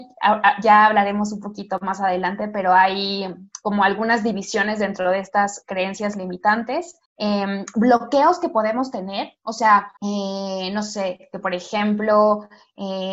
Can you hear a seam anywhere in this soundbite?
yes; 2 cuts; at 7.1 s, 10.0 s

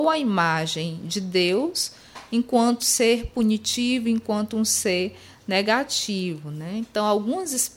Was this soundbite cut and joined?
yes; 1 cut; at 2.8 s

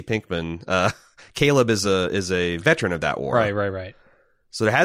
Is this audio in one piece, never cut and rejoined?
yes; 0 cuts

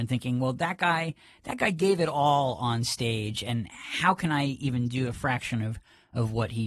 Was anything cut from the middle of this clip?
no; 0 cuts

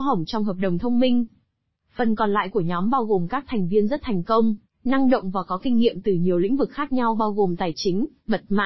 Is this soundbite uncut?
yes; 0 cuts

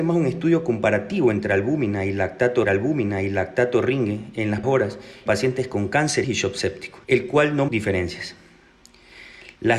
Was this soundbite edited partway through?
yes; 6 cuts; at 2.6 s, 4.6 s, 5.3 s, 6.2 s, 7.0 s, 7.7 s

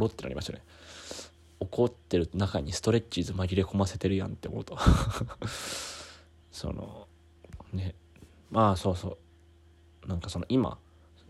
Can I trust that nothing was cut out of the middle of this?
yes; 0 cuts

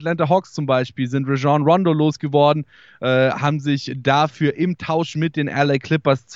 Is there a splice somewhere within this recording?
no; 0 cuts

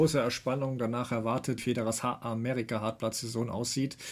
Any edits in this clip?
yes; 1 cut; at 1.6 s

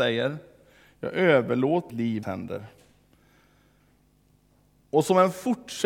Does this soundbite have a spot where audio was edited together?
yes; 2 cuts; at 1.9 s, 2.2 s

